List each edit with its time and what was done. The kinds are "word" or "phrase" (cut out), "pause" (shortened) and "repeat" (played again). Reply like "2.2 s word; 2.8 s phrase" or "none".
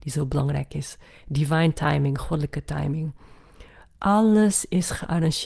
none